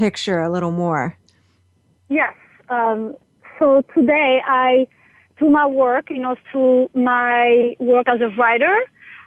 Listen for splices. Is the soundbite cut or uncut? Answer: uncut